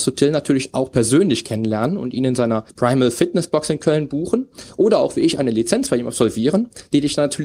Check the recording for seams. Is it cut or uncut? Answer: cut